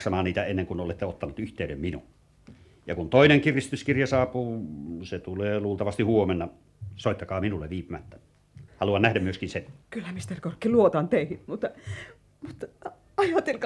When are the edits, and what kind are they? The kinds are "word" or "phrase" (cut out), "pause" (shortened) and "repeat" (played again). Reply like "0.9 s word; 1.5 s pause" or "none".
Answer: 8.7 s pause

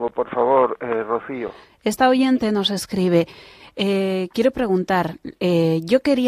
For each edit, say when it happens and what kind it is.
none

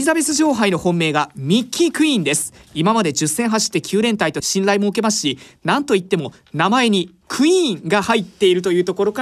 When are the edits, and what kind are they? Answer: none

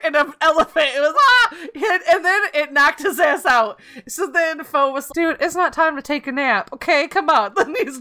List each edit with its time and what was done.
1.1 s word; 5.1 s word

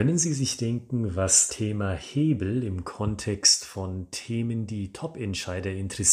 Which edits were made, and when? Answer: 1.5 s word

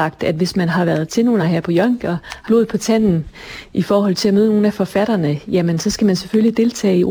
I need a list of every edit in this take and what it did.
1.4 s word; 2.0 s word; 2.5 s word

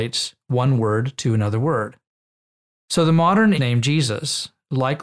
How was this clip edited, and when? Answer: 3.6 s word

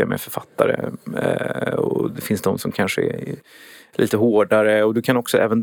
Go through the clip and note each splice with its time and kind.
none

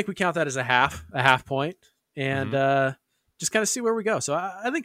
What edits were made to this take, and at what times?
none

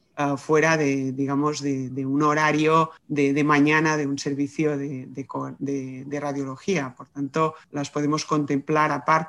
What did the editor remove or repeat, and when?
1.9 s word; 3.0 s pause; 7.6 s pause

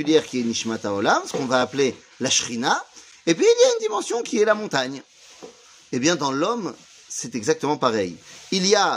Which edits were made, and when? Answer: none

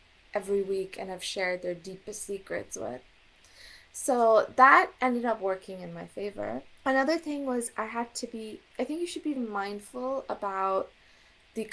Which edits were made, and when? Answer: 6.8 s pause; 9.4 s word

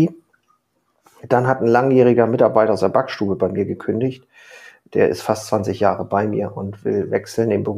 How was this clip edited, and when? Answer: none

